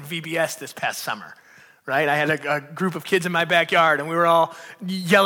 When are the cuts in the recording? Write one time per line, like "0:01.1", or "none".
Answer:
none

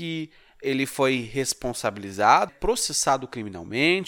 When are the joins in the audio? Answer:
0:02.5

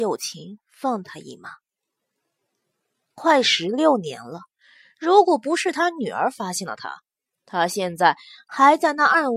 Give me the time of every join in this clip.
none

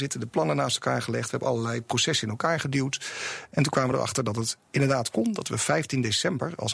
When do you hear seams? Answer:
none

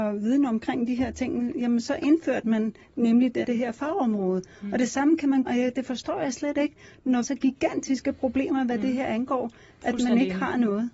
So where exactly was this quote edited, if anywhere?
0:03.4
0:05.5
0:07.2

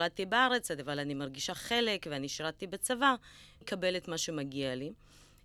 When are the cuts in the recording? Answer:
0:03.6

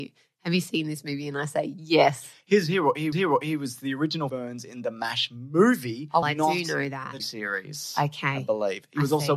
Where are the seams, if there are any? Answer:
0:03.1
0:04.3
0:06.2
0:07.2

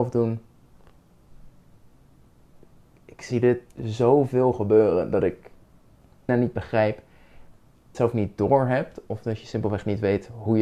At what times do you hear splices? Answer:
0:03.7
0:06.3
0:07.9

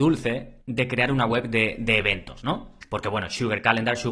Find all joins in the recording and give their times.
none

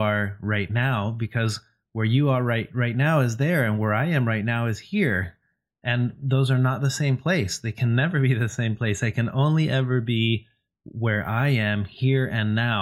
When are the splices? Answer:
none

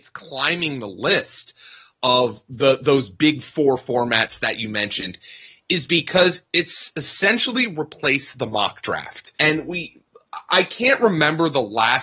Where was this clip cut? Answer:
0:06.4
0:09.3

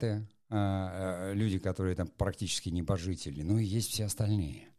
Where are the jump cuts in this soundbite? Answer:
none

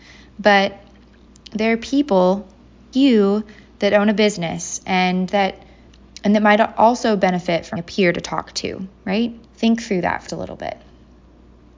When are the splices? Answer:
0:02.9
0:07.8
0:09.4
0:10.3

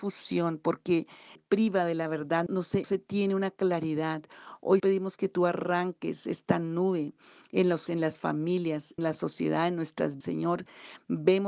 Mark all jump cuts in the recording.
0:01.4
0:02.5
0:02.8
0:04.8
0:07.9
0:09.0
0:10.2

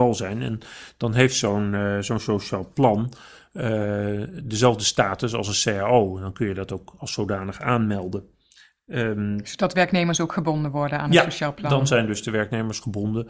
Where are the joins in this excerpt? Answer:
none

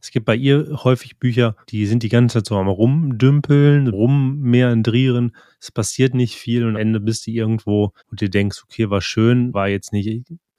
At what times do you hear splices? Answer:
0:01.6
0:03.9
0:06.7
0:08.0
0:09.5

